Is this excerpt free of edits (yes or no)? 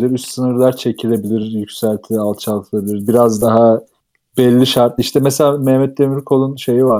yes